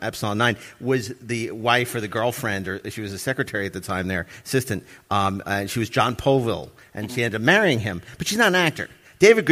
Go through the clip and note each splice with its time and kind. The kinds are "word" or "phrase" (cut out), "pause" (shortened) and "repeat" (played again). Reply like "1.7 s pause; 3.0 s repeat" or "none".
none